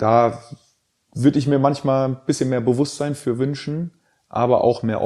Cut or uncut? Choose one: uncut